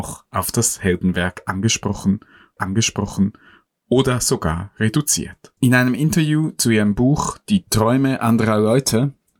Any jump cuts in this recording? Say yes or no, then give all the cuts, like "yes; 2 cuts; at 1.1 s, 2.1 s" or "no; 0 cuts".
yes; 2 cuts; at 2.6 s, 5.6 s